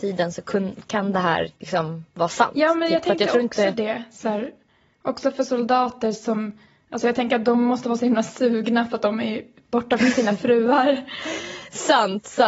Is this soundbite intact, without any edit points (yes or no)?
no